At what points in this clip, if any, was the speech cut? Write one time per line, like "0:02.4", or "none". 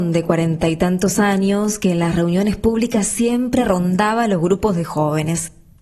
none